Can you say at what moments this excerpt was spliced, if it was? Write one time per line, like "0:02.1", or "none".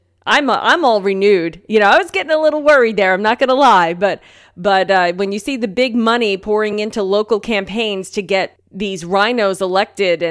none

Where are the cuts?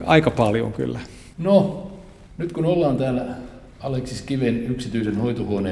none

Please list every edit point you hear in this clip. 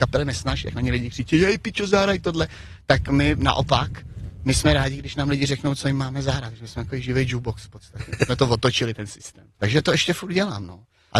none

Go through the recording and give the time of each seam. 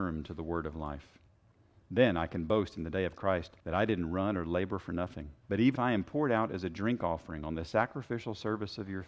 0:03.6
0:05.4
0:05.8

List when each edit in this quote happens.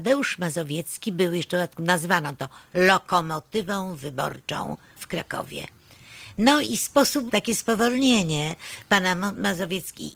0:05.0
0:06.7
0:07.3

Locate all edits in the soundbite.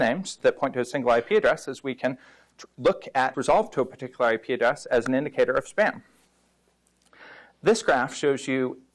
0:03.3

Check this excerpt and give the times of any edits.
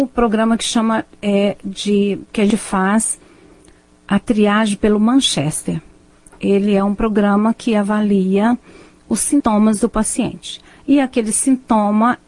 none

